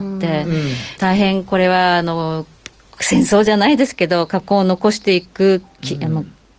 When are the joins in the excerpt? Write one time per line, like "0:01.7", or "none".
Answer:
0:01.0